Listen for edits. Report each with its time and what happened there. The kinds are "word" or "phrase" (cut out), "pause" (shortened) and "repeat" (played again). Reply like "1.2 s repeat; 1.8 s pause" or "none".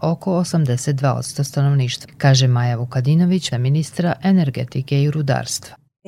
2.0 s word; 3.5 s word